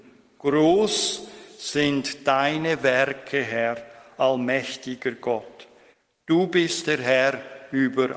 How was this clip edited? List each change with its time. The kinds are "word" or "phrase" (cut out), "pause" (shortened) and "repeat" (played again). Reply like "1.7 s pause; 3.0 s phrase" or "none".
none

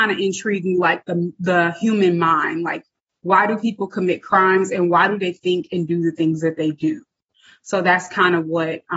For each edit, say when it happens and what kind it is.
none

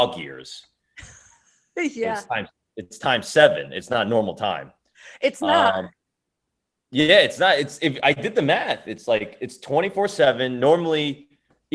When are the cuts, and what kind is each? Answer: none

